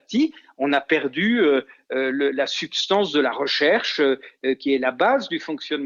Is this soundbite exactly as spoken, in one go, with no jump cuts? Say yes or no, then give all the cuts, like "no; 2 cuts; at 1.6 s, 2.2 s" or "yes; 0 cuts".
yes; 0 cuts